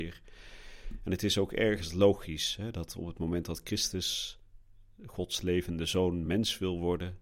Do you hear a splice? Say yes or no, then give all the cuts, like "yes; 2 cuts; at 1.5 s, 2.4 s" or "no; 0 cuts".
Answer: no; 0 cuts